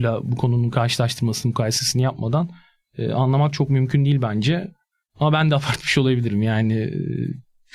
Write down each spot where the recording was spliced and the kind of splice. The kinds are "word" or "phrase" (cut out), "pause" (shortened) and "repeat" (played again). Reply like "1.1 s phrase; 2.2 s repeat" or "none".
none

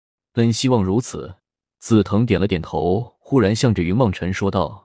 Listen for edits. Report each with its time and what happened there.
1.4 s pause

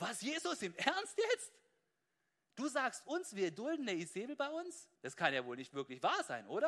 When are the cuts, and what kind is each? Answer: 4.9 s pause

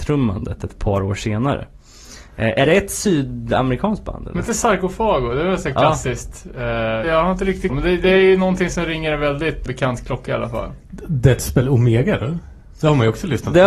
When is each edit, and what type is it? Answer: 7.0 s word; 7.7 s word; 9.7 s word

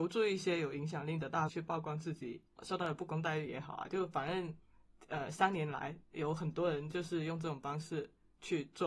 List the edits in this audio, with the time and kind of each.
1.5 s word; 2.6 s word

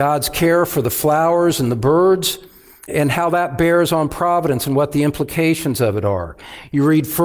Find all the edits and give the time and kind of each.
2.9 s word

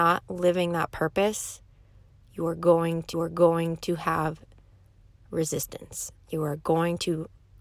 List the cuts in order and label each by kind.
3.1 s repeat

